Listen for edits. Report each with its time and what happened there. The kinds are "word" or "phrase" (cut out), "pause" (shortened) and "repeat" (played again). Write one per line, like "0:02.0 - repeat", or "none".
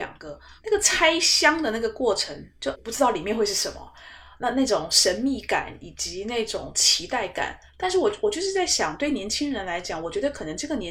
0:02.7 - word
0:07.7 - pause

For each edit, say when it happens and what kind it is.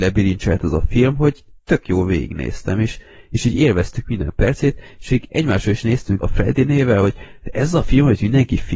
0:06.2 - word

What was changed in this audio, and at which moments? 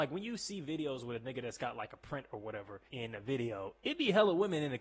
0:02.9 - pause

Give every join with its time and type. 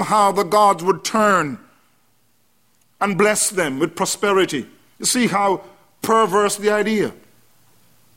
none

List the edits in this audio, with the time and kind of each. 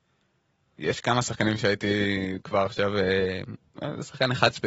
none

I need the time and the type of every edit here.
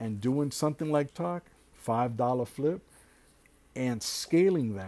0:01.1 - word
0:01.7 - word

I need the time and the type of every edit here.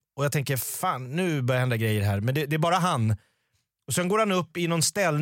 none

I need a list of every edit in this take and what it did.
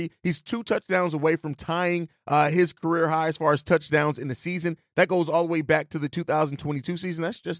none

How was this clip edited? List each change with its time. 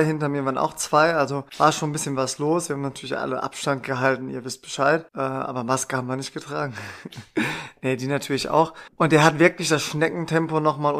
0:01.5 - pause
0:05.1 - pause
0:08.9 - pause

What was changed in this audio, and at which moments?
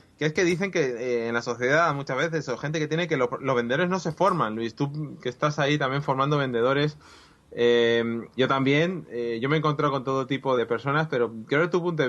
0:08.4 - word
0:10.6 - word

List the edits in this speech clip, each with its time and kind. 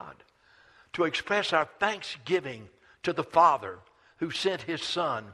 none

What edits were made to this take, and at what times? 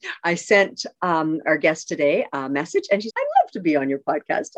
0:01.4 - word
0:03.1 - word

